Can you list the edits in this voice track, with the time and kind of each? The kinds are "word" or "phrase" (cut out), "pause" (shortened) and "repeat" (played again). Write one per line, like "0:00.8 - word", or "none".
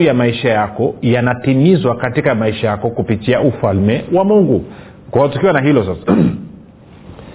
none